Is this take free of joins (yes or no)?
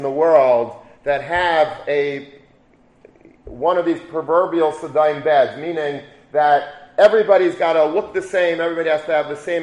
yes